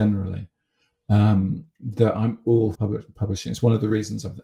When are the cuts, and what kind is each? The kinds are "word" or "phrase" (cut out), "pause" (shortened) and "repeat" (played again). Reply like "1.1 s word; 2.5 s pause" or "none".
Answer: 2.7 s phrase